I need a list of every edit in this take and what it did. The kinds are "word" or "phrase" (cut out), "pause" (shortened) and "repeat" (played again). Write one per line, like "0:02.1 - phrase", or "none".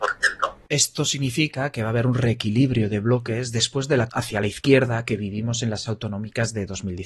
0:04.1 - word
0:05.9 - word